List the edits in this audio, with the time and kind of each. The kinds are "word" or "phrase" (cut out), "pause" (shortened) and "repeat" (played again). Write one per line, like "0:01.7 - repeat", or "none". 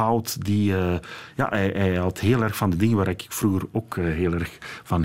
none